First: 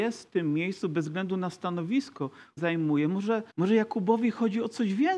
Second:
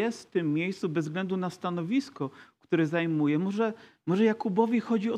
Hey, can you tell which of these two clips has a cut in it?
first; 2 cuts; at 2.6 s, 3.5 s

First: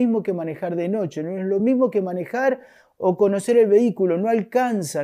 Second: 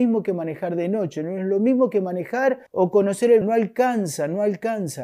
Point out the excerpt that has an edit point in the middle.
second; 2 cuts; at 2.7 s, 3.4 s

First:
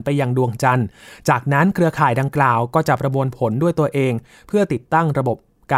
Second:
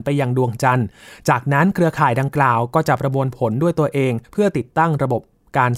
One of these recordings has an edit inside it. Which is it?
second; 1 cut; at 4.2 s

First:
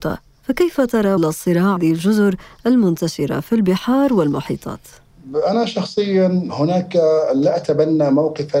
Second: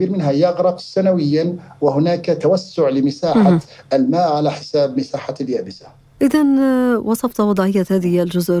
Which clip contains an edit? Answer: first; 2 cuts; at 1.2 s, 1.8 s

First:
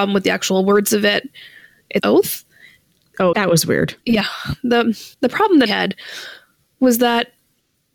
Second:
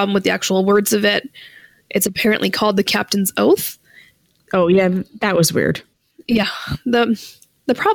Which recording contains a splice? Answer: first; 5 cuts; at 2.0 s, 3.3 s, 4.0 s, 5.1 s, 5.7 s

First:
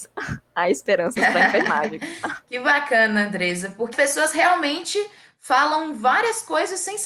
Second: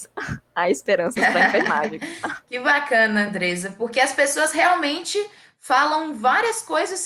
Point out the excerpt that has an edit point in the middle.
first; 1 cut; at 3.9 s

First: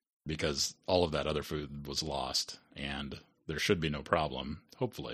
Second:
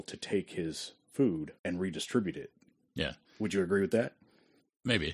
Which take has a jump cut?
second; 1 cut; at 1.6 s

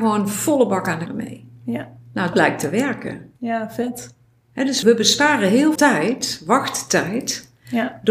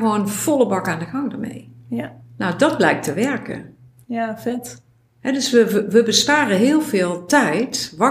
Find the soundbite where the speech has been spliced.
first; 5 cuts; at 1.1 s, 2.3 s, 3.4 s, 4.8 s, 5.8 s

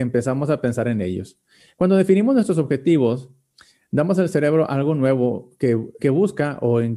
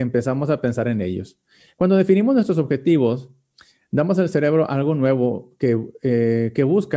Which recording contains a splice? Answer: first; 1 cut; at 6.0 s

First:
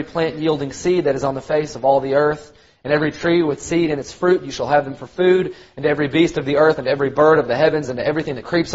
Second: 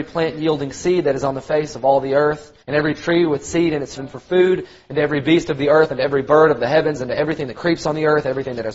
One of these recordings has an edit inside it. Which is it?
second; 2 cuts; at 2.6 s, 4.0 s

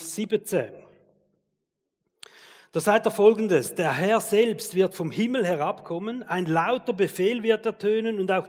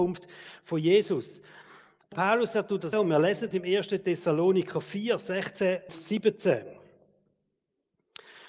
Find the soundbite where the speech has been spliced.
second; 4 cuts; at 2.1 s, 2.9 s, 3.5 s, 5.9 s

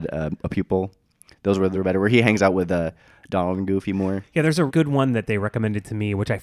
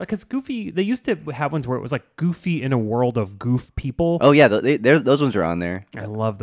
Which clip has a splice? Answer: first; 2 cuts; at 1.7 s, 4.7 s

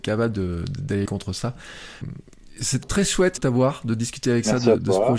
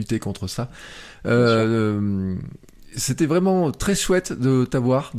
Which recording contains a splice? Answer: first; 4 cuts; at 1.1 s, 2.0 s, 2.8 s, 3.4 s

